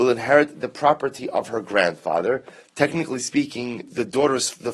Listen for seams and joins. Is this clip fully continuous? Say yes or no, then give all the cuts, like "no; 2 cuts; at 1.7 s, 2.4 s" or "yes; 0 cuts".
yes; 0 cuts